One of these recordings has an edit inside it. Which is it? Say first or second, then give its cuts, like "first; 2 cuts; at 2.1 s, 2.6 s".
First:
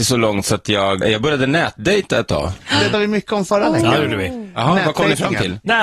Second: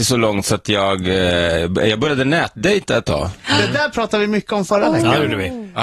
first; 2 cuts; at 1.0 s, 2.9 s